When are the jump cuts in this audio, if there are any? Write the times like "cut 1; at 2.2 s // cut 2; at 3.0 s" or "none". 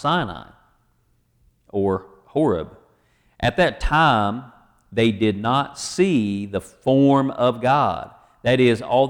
none